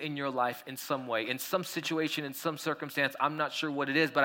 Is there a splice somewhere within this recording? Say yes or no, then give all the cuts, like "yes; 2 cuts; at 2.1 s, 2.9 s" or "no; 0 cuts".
no; 0 cuts